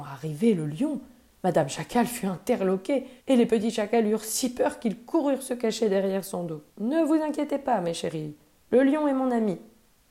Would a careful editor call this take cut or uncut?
cut